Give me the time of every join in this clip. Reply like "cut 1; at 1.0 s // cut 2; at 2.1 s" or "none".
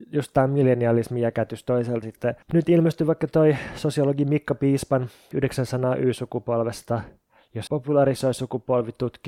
cut 1; at 2.0 s // cut 2; at 2.4 s // cut 3; at 5.3 s // cut 4; at 7.7 s